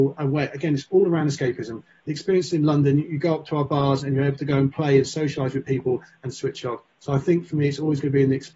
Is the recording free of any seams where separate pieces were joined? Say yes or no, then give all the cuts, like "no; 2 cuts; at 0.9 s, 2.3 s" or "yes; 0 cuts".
yes; 0 cuts